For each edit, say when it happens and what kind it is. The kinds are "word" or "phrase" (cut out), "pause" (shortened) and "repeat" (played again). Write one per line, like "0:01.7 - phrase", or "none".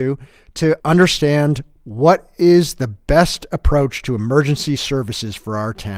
none

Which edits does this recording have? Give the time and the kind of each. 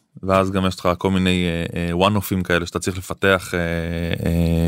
none

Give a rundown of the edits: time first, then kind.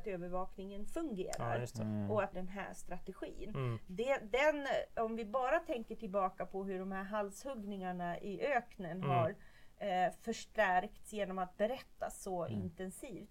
0:02.3 - phrase

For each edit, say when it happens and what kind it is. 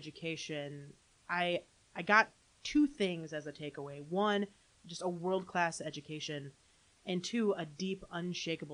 none

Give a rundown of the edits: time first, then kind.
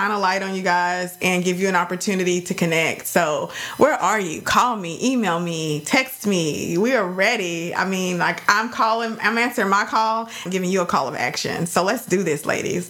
0:10.5 - phrase

